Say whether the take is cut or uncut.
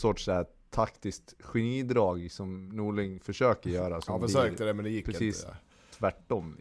uncut